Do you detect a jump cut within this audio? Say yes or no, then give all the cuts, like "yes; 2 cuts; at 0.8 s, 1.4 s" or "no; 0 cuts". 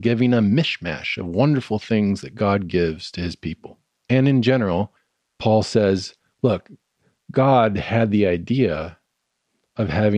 no; 0 cuts